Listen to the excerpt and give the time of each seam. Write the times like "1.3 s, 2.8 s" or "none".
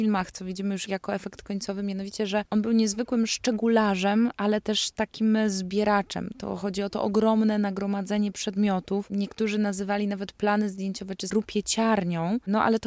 11.3 s